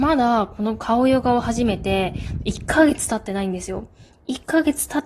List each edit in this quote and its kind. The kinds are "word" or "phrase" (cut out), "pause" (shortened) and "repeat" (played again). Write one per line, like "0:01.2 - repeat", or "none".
none